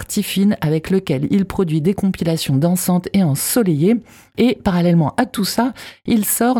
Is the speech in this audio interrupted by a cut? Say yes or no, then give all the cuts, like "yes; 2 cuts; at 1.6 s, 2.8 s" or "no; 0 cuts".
no; 0 cuts